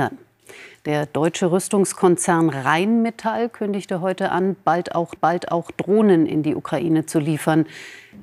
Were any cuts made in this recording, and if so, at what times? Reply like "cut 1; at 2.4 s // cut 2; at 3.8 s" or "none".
cut 1; at 5.2 s